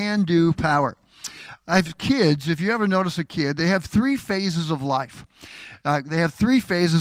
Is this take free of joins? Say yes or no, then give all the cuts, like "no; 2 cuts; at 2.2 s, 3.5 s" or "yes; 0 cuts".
yes; 0 cuts